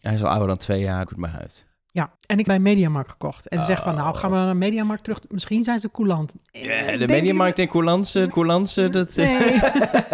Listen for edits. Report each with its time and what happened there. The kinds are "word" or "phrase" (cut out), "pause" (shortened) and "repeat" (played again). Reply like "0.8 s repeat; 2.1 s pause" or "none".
1.1 s phrase; 2.2 s pause; 2.5 s word; 8.3 s repeat